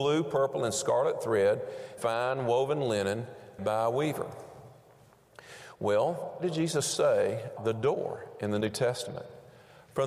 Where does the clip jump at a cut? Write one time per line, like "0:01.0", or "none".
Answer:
0:02.0
0:03.6
0:06.4
0:07.6

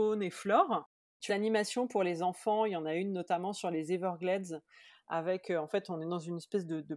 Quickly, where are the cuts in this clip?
0:01.3

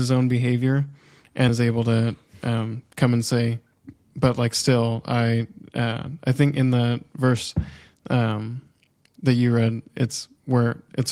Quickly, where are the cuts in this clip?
0:01.5

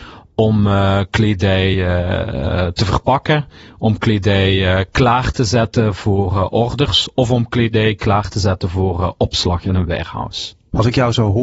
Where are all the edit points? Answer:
none

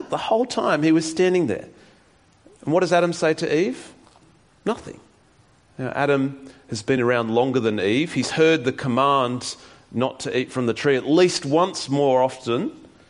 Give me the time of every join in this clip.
none

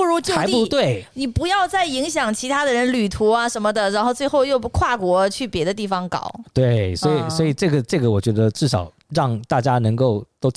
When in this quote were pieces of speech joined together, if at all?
0:09.0

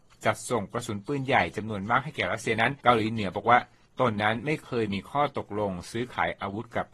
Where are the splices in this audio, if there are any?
0:02.8

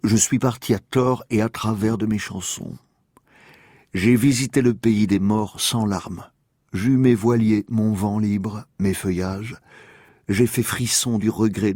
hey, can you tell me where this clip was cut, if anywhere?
none

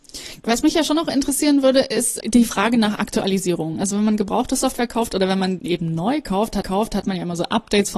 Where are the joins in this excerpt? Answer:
0:02.2
0:05.6
0:06.6

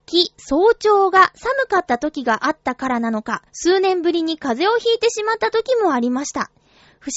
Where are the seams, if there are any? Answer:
0:03.5

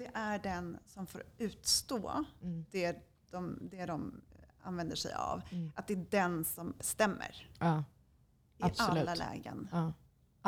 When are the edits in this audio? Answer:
0:06.8

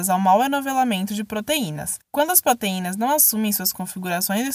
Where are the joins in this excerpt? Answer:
0:02.0

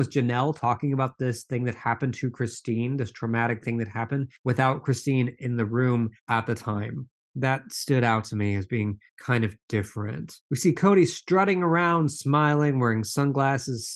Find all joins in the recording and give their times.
0:04.4
0:06.2
0:09.1
0:10.4

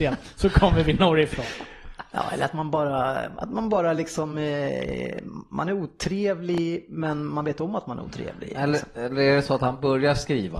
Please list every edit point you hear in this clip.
none

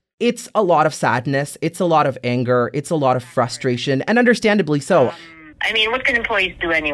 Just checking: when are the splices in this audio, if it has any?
0:05.5

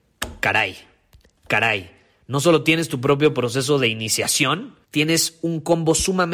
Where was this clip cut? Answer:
0:04.8

